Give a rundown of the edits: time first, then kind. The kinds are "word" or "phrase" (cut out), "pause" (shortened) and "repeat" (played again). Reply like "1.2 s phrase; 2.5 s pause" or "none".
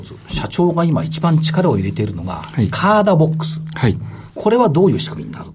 4.3 s pause

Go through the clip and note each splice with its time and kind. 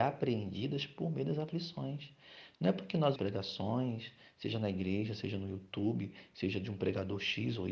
3.1 s word

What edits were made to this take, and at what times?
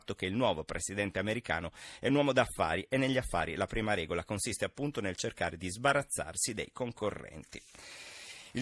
none

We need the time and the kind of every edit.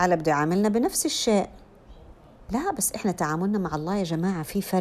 none

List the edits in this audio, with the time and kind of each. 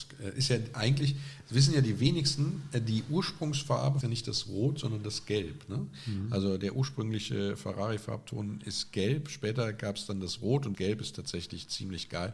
4.0 s phrase; 10.7 s word

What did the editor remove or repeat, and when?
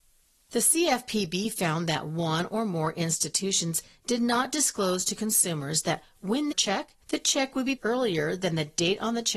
6.5 s phrase; 7.0 s pause; 7.8 s word

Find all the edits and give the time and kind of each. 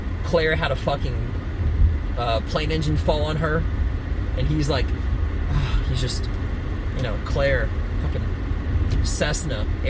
none

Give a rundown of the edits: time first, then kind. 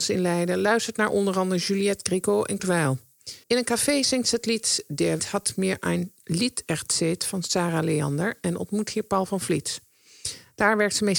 2.6 s word; 3.4 s pause; 5.2 s word

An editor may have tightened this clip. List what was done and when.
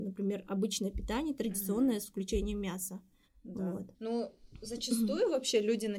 3.2 s pause; 3.9 s pause

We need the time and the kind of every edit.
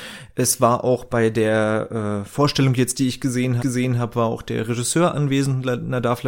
3.6 s repeat

